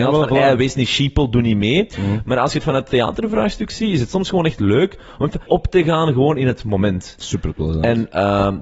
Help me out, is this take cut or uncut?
cut